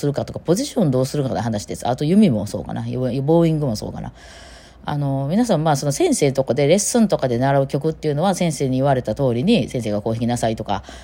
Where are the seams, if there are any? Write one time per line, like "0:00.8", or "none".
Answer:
none